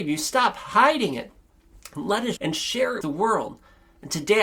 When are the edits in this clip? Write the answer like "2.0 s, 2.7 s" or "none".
2.4 s, 3.0 s

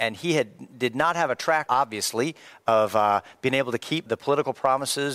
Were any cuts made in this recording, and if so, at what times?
1.7 s, 4.1 s

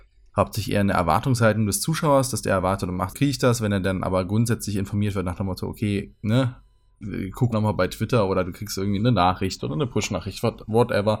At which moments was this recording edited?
3.1 s, 7.5 s, 9.0 s

